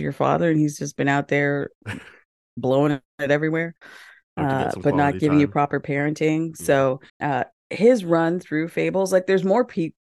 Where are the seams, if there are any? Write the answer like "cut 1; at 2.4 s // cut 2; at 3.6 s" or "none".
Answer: cut 1; at 7.1 s